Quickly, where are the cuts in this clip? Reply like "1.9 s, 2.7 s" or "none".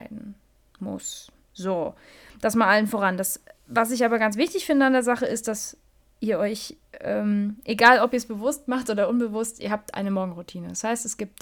none